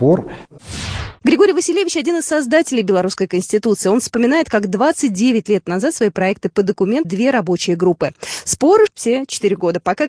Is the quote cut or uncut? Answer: cut